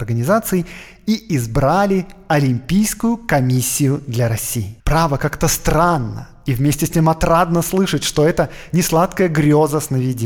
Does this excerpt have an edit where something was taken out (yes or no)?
yes